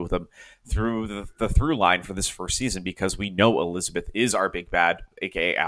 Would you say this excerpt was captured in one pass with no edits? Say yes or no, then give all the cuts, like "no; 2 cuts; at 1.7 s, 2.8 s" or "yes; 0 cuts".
yes; 0 cuts